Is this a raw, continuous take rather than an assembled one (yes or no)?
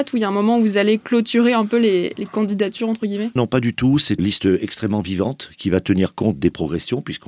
no